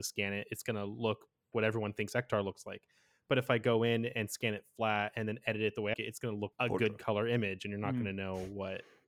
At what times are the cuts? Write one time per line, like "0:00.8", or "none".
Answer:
0:01.5
0:05.9
0:06.5